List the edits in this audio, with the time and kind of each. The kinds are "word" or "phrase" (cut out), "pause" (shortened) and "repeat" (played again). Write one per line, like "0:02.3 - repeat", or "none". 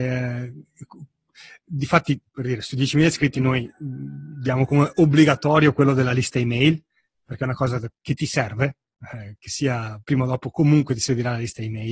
0:02.3 - pause
0:10.0 - pause